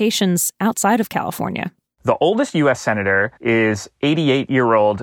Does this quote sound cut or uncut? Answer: cut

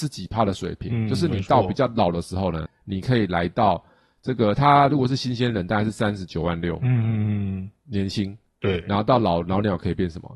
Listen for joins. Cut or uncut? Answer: cut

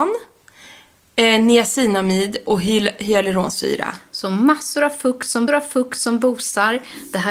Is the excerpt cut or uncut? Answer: cut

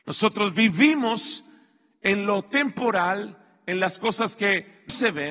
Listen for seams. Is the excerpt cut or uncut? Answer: uncut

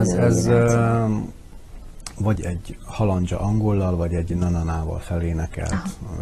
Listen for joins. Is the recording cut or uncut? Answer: cut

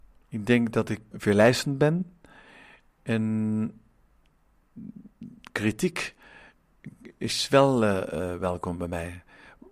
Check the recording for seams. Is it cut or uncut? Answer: cut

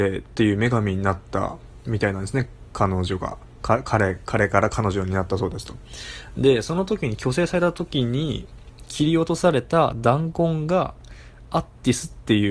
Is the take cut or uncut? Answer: uncut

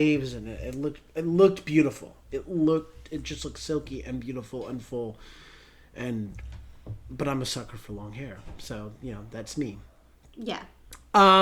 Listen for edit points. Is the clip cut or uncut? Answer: uncut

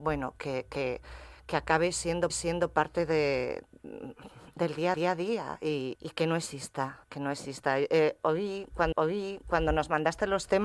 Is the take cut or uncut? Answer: cut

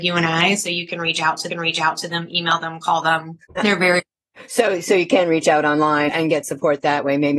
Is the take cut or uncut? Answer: cut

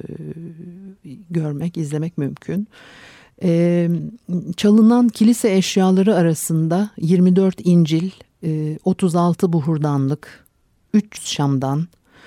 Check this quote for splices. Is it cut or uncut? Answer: uncut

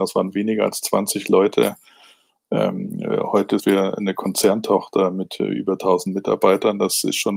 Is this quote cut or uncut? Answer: cut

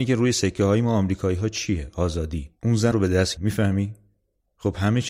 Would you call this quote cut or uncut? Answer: cut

